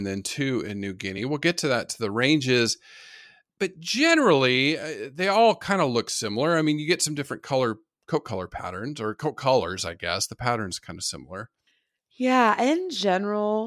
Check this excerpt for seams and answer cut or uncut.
uncut